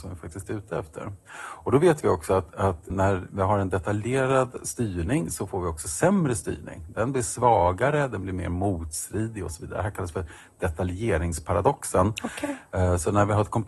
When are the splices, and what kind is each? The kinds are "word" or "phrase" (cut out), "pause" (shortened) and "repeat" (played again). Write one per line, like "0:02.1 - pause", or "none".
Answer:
0:02.9 - word